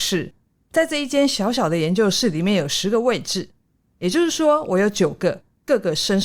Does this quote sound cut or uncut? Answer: uncut